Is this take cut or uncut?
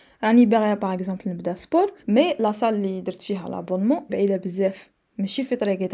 cut